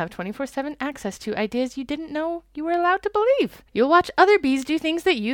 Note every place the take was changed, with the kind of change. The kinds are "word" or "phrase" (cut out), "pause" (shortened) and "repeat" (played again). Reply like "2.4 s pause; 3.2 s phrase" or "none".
3.7 s pause